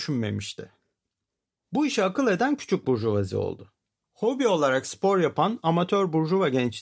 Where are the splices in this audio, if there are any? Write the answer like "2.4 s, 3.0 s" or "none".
none